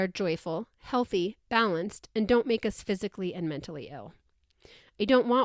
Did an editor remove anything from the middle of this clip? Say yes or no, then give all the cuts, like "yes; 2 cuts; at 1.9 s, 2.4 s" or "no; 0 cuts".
no; 0 cuts